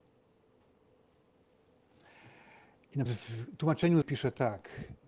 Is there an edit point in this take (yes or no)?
yes